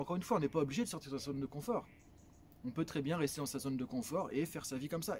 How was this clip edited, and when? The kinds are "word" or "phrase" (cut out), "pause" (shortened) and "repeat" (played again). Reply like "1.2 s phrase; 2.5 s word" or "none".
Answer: none